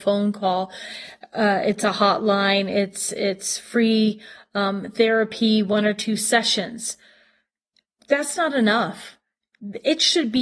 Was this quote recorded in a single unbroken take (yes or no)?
yes